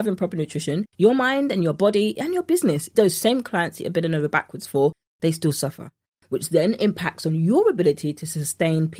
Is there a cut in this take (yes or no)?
no